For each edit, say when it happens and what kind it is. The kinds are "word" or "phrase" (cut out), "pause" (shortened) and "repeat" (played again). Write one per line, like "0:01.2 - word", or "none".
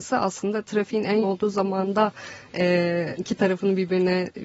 0:01.2 - word
0:03.2 - word